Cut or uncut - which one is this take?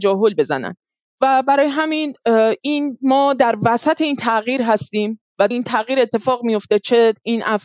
cut